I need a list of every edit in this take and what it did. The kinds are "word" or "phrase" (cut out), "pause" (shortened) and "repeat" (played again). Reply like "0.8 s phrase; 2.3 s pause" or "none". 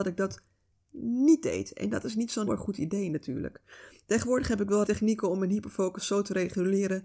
2.5 s word; 4.8 s word

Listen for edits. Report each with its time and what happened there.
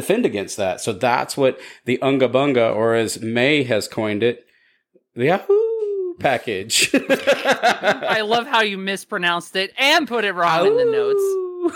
none

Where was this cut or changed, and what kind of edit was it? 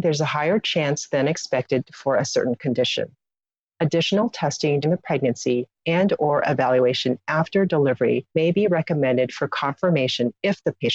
4.8 s word; 8.3 s pause

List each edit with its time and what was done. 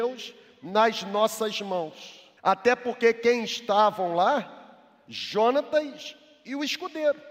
2.4 s pause

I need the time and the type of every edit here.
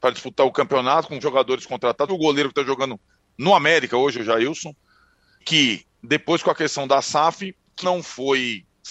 1.2 s word; 2.1 s word; 5.4 s word; 7.8 s word

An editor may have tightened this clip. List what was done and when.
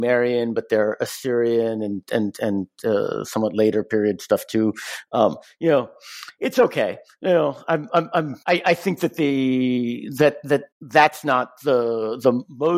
8.4 s pause; 10.7 s pause

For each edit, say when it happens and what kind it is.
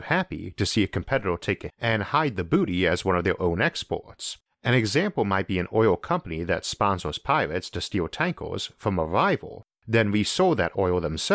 1.7 s word; 4.5 s pause

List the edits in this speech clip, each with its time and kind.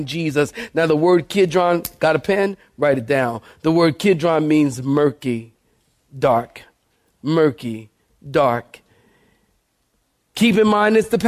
none

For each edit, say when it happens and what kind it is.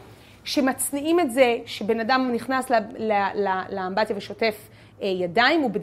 none

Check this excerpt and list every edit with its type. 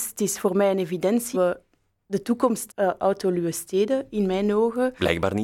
1.3 s word; 2.7 s word

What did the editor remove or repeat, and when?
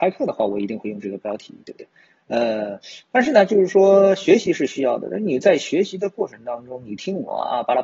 none

